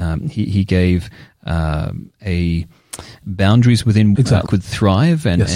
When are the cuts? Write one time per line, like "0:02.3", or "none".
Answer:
0:03.2
0:04.1
0:04.5